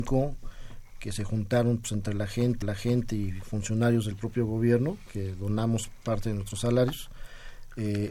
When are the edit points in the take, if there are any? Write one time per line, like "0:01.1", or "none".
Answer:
0:02.6